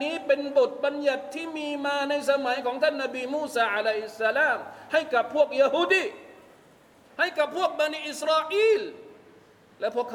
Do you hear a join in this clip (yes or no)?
no